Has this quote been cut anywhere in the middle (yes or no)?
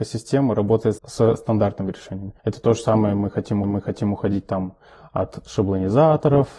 yes